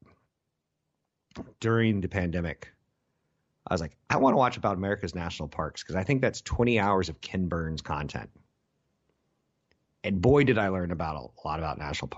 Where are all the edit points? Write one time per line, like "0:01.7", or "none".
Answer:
none